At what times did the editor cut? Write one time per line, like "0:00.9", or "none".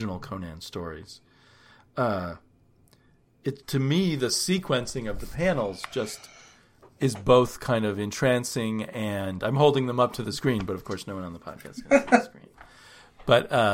0:03.6